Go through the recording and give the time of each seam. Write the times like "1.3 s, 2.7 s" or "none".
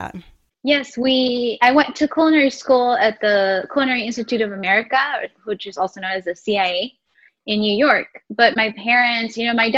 none